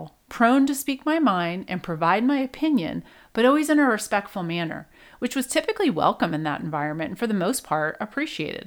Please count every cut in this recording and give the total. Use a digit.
0